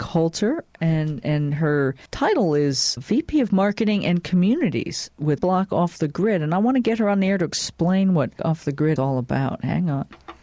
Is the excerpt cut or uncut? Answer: cut